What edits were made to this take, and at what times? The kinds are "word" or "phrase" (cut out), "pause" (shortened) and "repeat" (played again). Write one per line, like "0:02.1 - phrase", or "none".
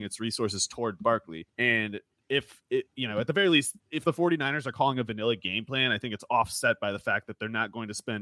0:01.5 - pause
0:03.8 - pause